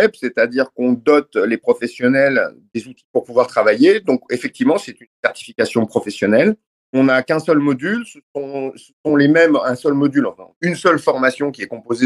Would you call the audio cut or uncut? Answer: uncut